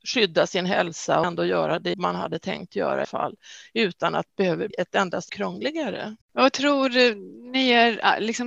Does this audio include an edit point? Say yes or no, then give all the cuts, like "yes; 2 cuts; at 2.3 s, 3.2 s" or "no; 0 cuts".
yes; 7 cuts; at 1.2 s, 1.9 s, 3.0 s, 4.3 s, 4.7 s, 5.3 s, 6.2 s